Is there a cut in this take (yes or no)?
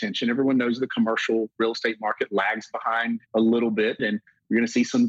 yes